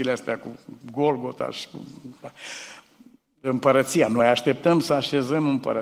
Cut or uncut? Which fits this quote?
uncut